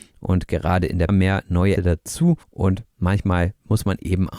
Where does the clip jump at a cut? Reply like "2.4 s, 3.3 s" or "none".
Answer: 1.1 s, 1.8 s, 2.4 s